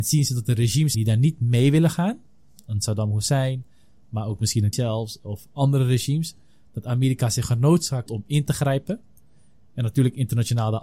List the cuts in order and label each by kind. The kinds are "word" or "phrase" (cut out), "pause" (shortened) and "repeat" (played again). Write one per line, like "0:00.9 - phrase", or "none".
0:00.9 - word
0:04.7 - word
0:08.1 - word